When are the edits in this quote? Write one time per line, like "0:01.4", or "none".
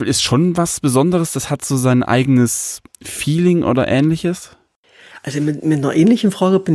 0:02.9